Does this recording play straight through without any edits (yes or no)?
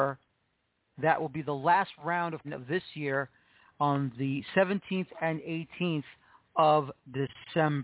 no